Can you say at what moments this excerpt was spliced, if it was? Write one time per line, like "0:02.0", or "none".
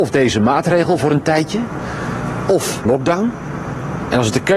0:02.9